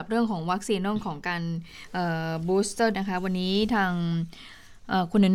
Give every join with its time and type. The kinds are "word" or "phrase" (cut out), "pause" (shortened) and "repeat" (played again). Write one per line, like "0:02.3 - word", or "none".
0:02.9 - word